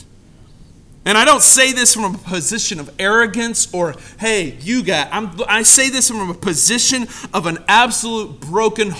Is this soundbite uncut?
yes; 0 cuts

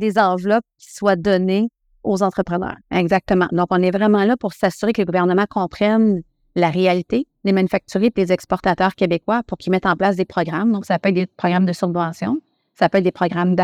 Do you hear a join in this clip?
yes; 1 cut; at 2.8 s

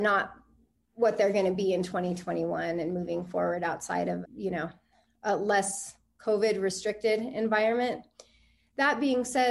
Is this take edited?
no; 0 cuts

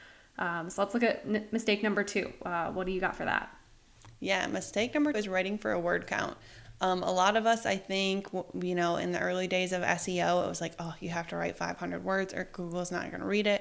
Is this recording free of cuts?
no; 1 cut; at 5.1 s

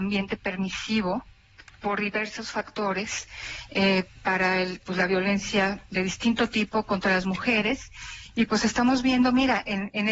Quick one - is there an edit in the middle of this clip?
no; 0 cuts

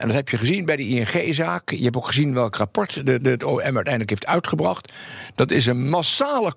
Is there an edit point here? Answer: yes; 1 cut; at 3.2 s

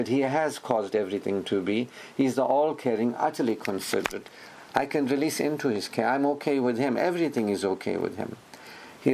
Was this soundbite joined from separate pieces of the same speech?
no; 0 cuts

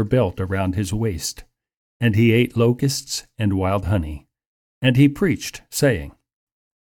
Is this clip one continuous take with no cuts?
yes; 0 cuts

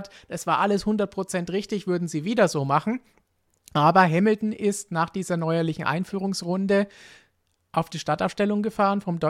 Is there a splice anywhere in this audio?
no; 0 cuts

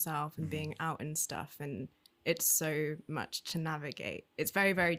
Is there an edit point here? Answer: no; 0 cuts

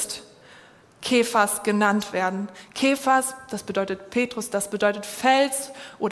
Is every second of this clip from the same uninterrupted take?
yes; 0 cuts

